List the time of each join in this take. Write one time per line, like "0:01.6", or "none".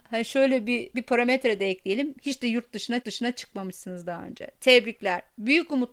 0:00.9
0:03.0